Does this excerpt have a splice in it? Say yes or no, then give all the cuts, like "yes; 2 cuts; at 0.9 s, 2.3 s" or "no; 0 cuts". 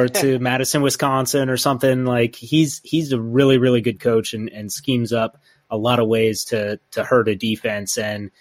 no; 0 cuts